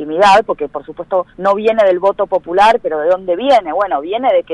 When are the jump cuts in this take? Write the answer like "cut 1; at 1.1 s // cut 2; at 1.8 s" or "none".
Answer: cut 1; at 1.3 s